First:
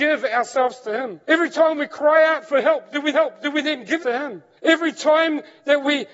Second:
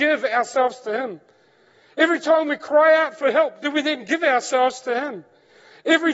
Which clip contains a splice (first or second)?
first